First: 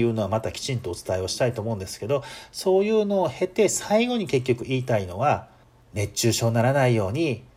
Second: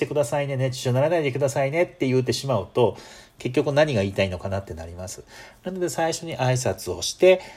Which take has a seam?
first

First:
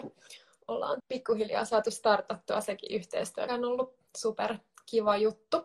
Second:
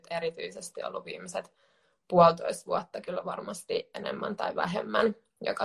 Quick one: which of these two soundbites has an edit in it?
first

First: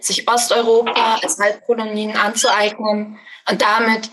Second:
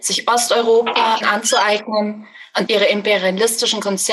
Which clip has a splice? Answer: second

